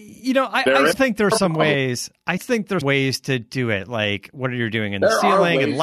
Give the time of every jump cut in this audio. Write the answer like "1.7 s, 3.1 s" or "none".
0.9 s, 2.4 s, 2.8 s